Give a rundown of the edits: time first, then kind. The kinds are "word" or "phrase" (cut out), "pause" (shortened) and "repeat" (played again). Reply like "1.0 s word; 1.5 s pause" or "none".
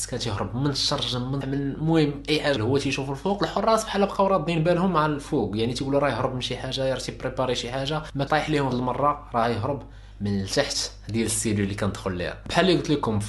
1.4 s phrase; 2.6 s phrase; 8.3 s word; 8.7 s phrase